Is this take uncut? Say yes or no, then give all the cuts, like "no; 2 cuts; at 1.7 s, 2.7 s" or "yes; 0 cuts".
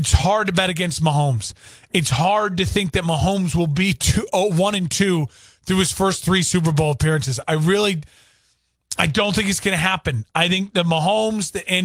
yes; 0 cuts